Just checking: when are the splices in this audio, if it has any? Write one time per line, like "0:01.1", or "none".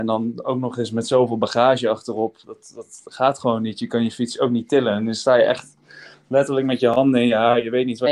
none